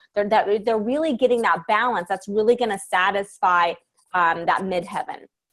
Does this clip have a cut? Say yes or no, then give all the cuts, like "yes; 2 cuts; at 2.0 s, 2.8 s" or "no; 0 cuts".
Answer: no; 0 cuts